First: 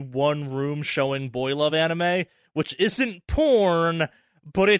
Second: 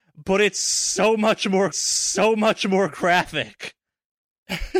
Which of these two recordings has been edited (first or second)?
second